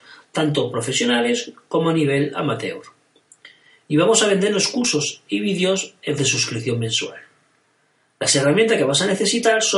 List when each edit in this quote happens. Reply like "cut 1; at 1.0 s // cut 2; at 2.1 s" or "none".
cut 1; at 6.2 s